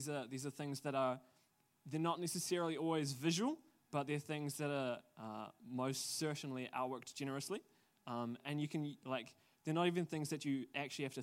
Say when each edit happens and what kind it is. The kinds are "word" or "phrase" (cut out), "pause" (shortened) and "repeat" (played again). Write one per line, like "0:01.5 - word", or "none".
none